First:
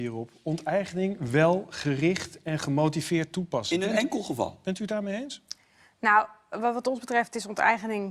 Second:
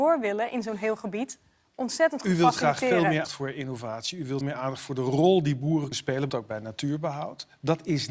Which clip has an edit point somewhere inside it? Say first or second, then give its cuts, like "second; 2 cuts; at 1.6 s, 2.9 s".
second; 4 cuts; at 3.2 s, 4.4 s, 5.9 s, 6.3 s